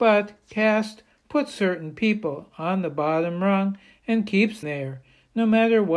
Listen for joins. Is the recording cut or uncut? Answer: cut